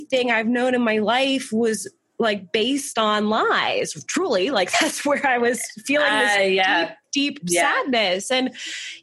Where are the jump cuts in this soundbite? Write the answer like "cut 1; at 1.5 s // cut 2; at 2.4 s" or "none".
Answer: none